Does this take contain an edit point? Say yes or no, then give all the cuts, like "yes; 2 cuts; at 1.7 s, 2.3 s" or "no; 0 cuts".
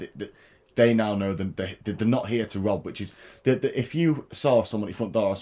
no; 0 cuts